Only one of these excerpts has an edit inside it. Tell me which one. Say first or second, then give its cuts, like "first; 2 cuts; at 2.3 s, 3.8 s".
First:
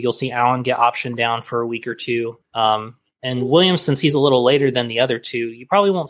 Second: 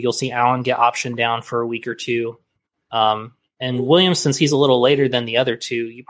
first; 1 cut; at 2.4 s